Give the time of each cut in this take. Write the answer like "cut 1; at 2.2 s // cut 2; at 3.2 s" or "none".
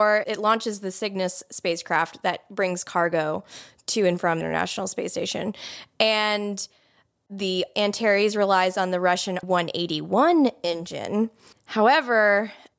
cut 1; at 4.4 s // cut 2; at 9.4 s // cut 3; at 11.5 s